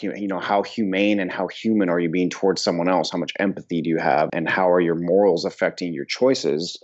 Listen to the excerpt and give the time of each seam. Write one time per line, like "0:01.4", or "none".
0:04.3